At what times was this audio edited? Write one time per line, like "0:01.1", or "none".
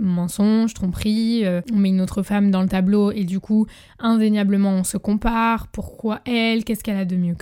none